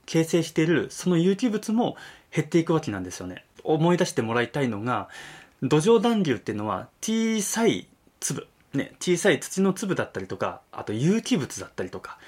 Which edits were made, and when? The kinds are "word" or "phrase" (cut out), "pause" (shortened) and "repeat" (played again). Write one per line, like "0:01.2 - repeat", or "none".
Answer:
none